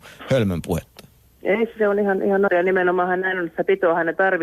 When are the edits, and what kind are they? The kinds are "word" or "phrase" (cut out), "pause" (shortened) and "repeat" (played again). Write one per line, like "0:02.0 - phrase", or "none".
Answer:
0:02.5 - phrase